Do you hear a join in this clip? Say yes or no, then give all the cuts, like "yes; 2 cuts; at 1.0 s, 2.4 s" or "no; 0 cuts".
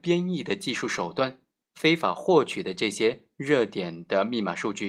no; 0 cuts